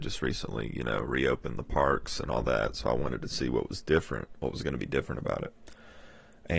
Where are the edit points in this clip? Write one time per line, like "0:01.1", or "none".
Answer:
none

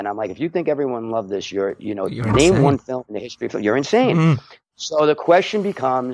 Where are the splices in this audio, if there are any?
none

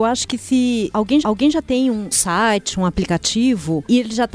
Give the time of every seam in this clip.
0:01.2
0:02.1

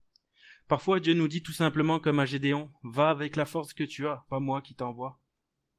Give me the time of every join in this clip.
0:04.3

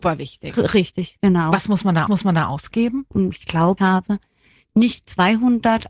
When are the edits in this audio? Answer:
0:02.1
0:03.8

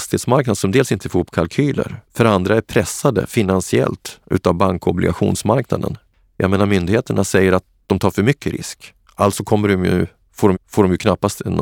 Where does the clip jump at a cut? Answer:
0:02.0
0:10.5

